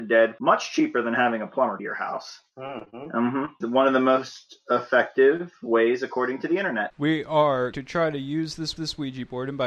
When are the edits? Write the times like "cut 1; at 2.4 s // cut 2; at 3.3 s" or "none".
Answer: cut 1; at 1.8 s // cut 2; at 7.7 s // cut 3; at 8.8 s